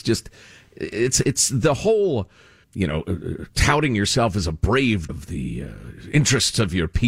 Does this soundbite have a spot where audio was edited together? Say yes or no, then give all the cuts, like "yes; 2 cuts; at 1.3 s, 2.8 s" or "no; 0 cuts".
yes; 2 cuts; at 2.6 s, 5.1 s